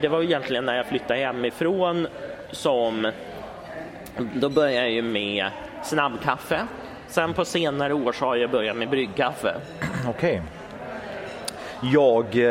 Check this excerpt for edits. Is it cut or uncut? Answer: uncut